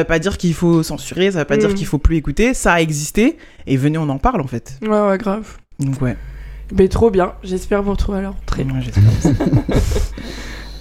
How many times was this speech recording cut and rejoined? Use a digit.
0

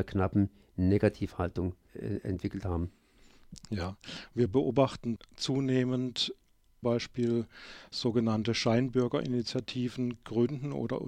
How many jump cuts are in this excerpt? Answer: 3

